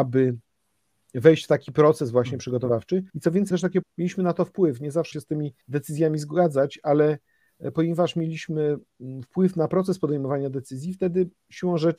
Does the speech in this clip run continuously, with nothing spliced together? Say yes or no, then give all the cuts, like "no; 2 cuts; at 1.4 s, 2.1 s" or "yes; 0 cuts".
no; 5 cuts; at 3.1 s, 3.5 s, 3.8 s, 5.1 s, 5.6 s